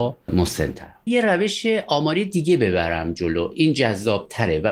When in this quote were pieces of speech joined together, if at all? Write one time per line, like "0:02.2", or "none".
0:01.1